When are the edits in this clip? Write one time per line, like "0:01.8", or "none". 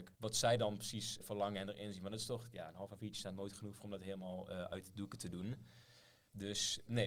none